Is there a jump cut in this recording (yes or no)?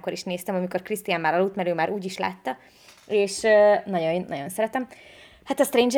no